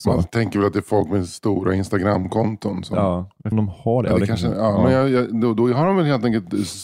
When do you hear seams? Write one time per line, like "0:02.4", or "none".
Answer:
0:03.5